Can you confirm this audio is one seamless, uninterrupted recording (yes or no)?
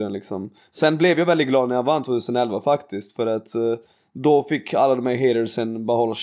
yes